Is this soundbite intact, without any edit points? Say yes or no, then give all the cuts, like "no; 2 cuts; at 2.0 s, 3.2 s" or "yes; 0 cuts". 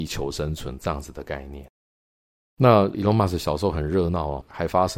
yes; 0 cuts